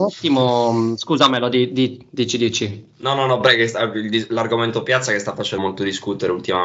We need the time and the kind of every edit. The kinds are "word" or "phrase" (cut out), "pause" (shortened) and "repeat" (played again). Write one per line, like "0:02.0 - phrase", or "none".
0:05.6 - word